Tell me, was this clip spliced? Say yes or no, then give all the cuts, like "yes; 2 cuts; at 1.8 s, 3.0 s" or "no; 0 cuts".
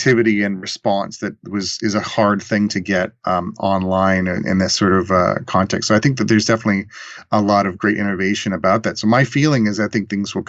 no; 0 cuts